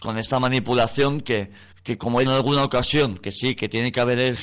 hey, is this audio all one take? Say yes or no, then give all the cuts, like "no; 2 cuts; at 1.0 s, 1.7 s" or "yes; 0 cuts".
no; 2 cuts; at 1.7 s, 2.3 s